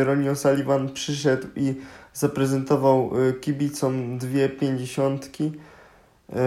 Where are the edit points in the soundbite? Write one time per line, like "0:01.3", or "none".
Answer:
none